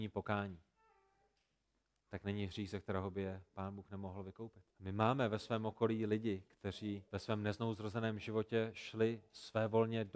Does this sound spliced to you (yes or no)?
yes